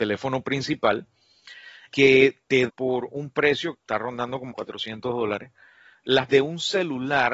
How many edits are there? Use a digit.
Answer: 5